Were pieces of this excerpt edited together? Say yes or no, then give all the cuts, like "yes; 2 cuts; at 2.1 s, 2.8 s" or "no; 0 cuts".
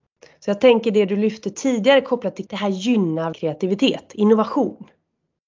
yes; 2 cuts; at 2.5 s, 3.3 s